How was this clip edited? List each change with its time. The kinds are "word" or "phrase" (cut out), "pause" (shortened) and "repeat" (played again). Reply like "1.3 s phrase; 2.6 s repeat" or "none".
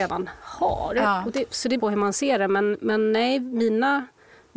1.8 s phrase